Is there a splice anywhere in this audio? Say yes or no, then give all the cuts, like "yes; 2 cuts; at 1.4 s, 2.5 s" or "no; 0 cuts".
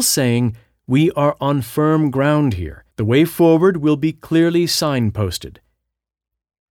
yes; 1 cut; at 2.9 s